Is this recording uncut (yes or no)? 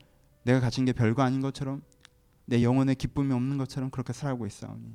yes